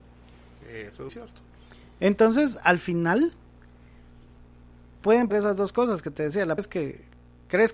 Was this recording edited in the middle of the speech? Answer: yes; 3 cuts; at 1.1 s, 5.3 s, 6.6 s

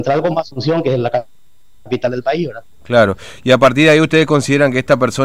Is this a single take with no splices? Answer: yes; 0 cuts

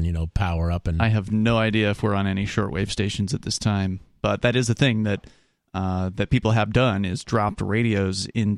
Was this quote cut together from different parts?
no; 0 cuts

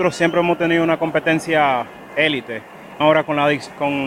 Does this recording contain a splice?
yes; 2 cuts; at 2.1 s, 3.0 s

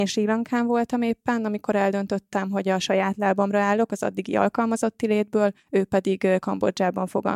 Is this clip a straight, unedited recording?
no; 1 cut; at 5.6 s

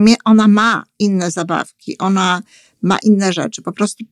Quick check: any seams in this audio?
no; 0 cuts

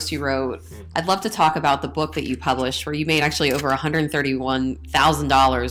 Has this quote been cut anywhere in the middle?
no; 0 cuts

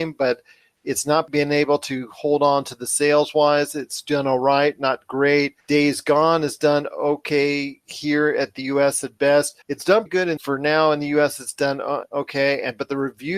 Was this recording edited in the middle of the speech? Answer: yes; 5 cuts; at 5.6 s, 9.6 s, 10.1 s, 10.4 s, 12.0 s

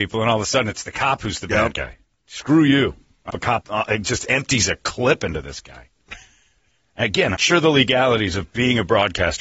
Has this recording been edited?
yes; 3 cuts; at 3.3 s, 3.6 s, 7.4 s

